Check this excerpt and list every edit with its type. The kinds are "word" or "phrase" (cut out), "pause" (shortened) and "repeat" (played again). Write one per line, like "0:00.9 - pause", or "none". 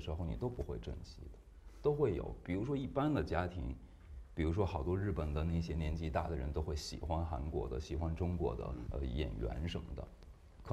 0:08.9 - word